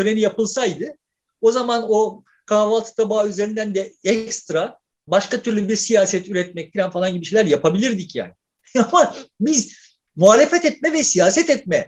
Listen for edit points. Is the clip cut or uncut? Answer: uncut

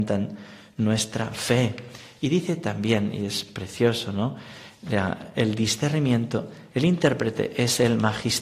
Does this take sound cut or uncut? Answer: uncut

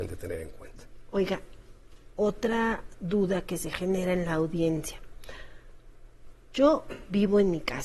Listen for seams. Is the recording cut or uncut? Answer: uncut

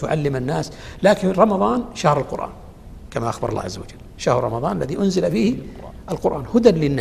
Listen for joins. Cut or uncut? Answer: uncut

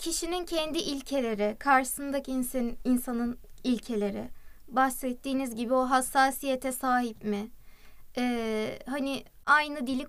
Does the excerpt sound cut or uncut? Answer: uncut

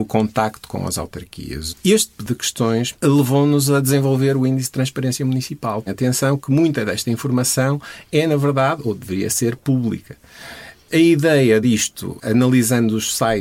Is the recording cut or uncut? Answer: cut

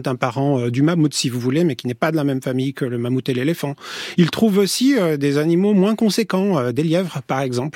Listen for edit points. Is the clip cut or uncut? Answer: uncut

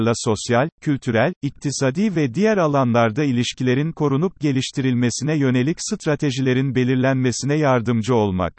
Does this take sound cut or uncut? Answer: uncut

